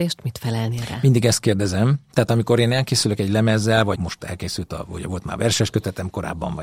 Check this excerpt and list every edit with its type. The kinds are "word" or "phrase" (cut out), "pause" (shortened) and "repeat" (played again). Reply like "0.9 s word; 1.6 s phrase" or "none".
4.0 s word

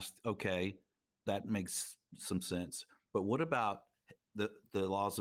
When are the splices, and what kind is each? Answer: none

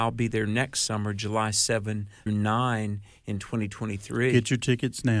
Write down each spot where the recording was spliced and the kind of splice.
2.3 s word

